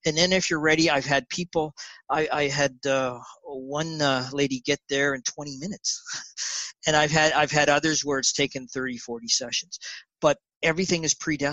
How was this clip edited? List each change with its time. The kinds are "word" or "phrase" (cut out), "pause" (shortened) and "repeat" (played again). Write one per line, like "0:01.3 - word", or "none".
none